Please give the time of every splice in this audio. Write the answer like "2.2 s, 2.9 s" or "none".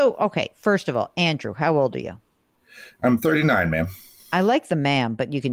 none

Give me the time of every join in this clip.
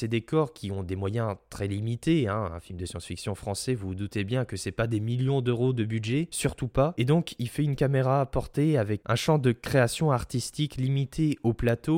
9.0 s

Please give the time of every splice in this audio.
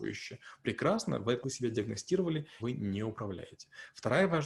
1.4 s, 2.6 s

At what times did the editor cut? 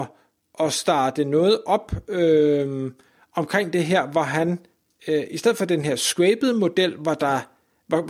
none

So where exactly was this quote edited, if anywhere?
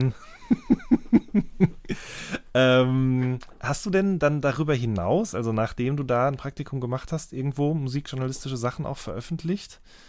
none

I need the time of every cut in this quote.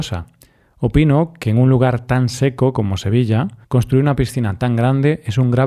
3.6 s

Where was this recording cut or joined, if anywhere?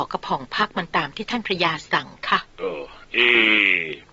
2.5 s

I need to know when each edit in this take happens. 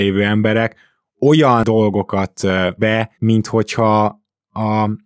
2.8 s, 3.1 s

